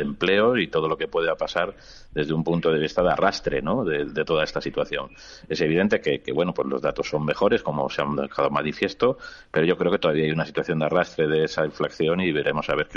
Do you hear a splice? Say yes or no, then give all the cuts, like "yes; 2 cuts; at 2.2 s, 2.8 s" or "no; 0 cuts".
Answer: no; 0 cuts